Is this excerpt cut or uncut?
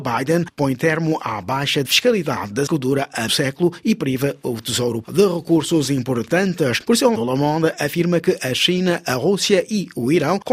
cut